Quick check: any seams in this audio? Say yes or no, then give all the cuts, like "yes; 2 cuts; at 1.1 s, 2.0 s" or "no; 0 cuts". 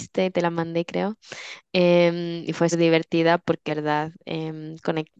yes; 2 cuts; at 2.7 s, 3.7 s